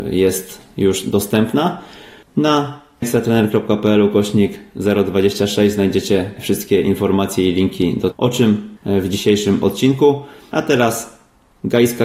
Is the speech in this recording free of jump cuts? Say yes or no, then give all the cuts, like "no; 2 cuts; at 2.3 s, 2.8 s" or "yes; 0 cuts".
no; 4 cuts; at 3.0 s, 6.4 s, 8.1 s, 8.8 s